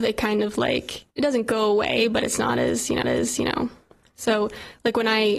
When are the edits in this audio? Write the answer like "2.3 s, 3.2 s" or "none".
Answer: 1.1 s, 3.0 s